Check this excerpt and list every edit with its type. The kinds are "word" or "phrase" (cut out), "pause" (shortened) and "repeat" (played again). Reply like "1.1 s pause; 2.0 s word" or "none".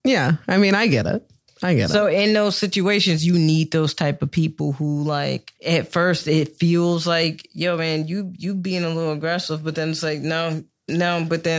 5.6 s pause